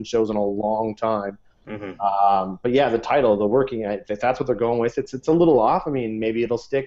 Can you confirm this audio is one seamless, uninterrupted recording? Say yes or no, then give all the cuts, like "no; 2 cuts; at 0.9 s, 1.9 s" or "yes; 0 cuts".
yes; 0 cuts